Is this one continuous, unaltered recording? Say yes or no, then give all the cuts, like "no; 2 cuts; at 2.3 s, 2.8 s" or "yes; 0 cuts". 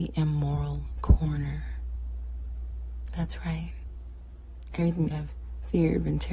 no; 1 cut; at 5.1 s